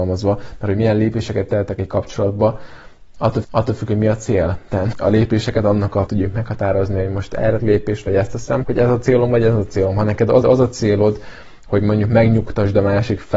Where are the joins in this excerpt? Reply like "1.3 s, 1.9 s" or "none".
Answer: 3.4 s, 4.9 s, 6.1 s, 7.6 s, 8.6 s, 10.4 s